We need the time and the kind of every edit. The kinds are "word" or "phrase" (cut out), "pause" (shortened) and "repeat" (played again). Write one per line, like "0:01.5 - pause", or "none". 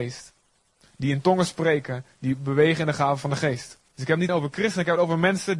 0:03.9 - pause
0:04.3 - word